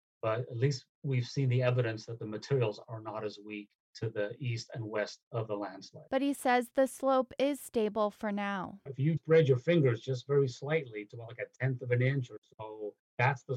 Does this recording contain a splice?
yes; 2 cuts; at 6.1 s, 9.2 s

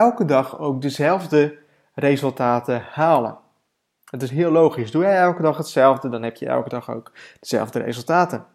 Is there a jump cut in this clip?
no; 0 cuts

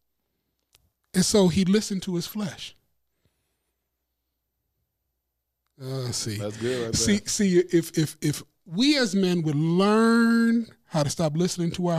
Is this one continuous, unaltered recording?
yes; 0 cuts

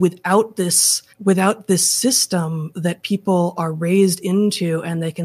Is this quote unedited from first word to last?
no; 1 cut; at 1.1 s

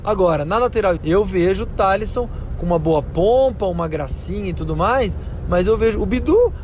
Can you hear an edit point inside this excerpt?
yes; 1 cut; at 1.0 s

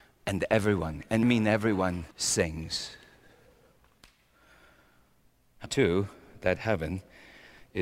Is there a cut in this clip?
yes; 4 cuts; at 1.2 s, 2.1 s, 5.7 s, 6.6 s

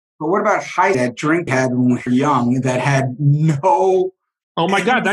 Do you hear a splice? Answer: yes; 3 cuts; at 0.9 s, 1.5 s, 2.1 s

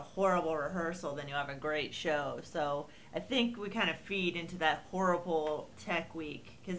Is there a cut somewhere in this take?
no; 0 cuts

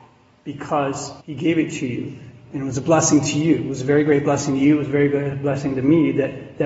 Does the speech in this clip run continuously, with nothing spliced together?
no; 1 cut; at 1.2 s

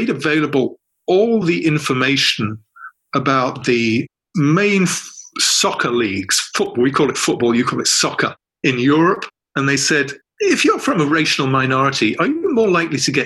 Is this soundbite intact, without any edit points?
yes; 0 cuts

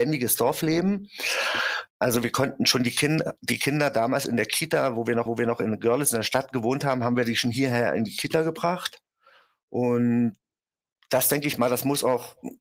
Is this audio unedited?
no; 1 cut; at 5.3 s

